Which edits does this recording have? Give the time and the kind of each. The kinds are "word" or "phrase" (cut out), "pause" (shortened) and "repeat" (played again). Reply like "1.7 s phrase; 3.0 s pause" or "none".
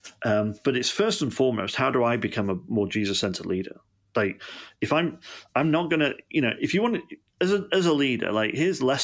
none